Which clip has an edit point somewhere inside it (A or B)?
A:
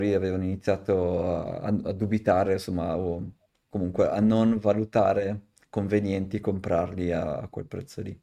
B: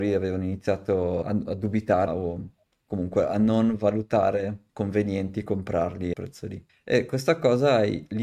B